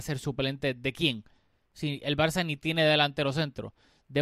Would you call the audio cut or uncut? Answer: uncut